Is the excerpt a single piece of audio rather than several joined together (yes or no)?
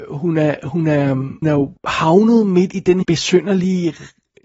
no